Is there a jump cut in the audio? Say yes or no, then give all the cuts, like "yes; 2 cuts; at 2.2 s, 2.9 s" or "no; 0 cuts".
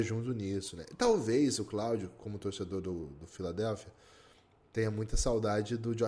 no; 0 cuts